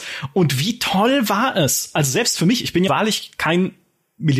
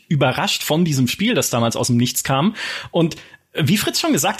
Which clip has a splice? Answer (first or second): first